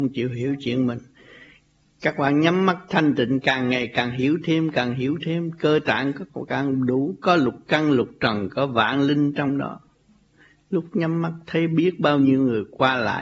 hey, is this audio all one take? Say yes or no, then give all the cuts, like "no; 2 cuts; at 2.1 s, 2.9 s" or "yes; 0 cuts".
yes; 0 cuts